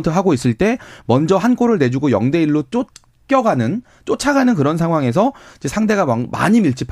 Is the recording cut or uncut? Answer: uncut